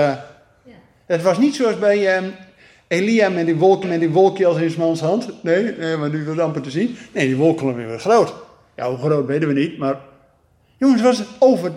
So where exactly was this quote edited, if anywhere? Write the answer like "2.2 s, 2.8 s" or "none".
3.8 s